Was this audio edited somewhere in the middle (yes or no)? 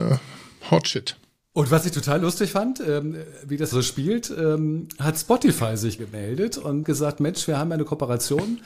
yes